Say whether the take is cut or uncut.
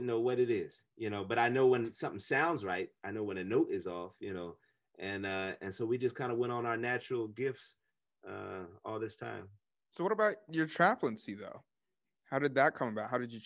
uncut